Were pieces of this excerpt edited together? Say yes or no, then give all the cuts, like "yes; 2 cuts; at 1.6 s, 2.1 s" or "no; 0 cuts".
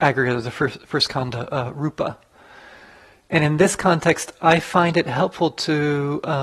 no; 0 cuts